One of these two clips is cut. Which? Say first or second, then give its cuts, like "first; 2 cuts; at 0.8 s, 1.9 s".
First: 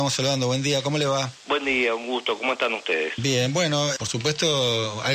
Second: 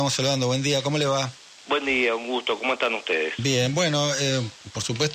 first; 2 cuts; at 1.4 s, 4.0 s